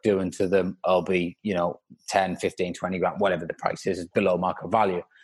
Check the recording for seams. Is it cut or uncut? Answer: uncut